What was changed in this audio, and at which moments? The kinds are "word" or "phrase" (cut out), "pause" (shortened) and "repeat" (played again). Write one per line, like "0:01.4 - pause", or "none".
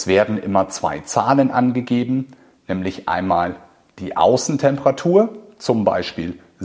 none